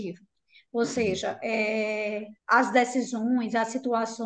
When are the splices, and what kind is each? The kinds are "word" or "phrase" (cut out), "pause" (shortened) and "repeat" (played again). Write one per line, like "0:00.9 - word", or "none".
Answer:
0:02.4 - pause